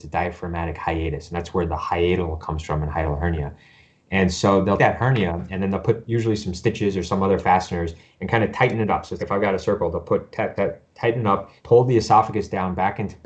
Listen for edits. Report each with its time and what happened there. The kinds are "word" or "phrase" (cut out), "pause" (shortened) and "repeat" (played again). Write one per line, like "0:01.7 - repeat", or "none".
0:04.8 - word
0:09.2 - word
0:10.6 - word
0:11.6 - pause